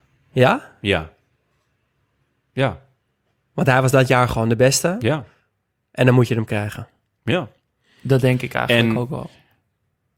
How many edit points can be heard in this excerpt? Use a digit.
0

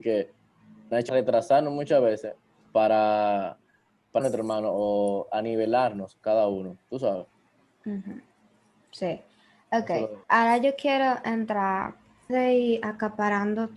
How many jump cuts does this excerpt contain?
4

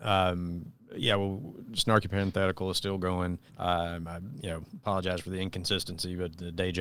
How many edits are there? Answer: 1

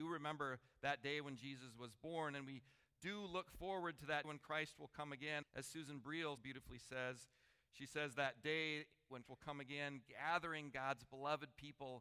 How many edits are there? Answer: 4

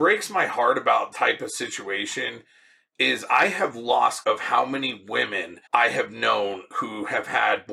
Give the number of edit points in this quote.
3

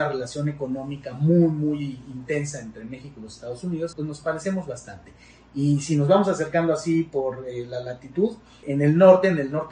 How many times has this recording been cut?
2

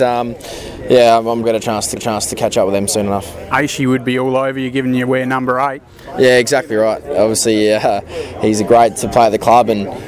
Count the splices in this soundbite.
2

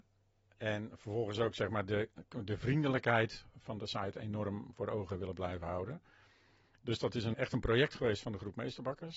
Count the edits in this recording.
1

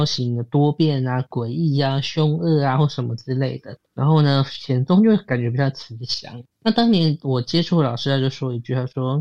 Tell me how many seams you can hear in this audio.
2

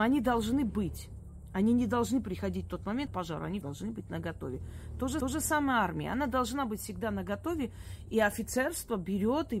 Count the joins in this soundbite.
3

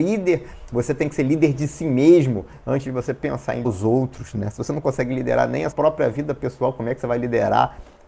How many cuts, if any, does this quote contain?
2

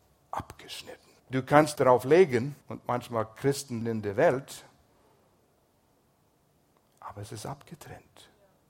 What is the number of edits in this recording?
4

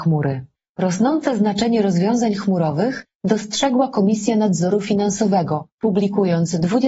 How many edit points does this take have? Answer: 0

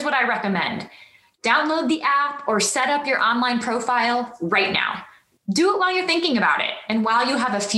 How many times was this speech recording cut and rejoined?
0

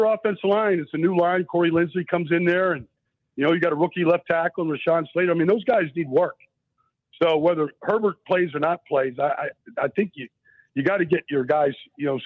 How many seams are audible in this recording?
0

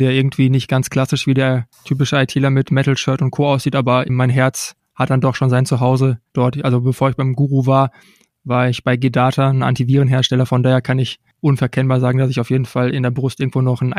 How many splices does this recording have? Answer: 1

